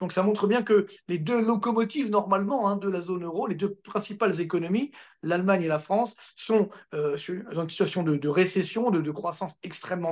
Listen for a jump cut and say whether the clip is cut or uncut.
uncut